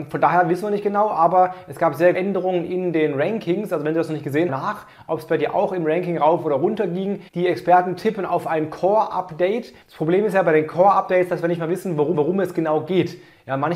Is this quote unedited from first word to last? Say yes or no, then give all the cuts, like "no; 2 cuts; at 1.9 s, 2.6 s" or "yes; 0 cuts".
no; 5 cuts; at 2.1 s, 4.5 s, 7.3 s, 9.8 s, 12.1 s